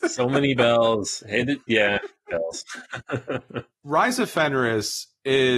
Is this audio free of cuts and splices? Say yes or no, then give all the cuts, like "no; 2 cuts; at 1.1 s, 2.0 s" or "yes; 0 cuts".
yes; 0 cuts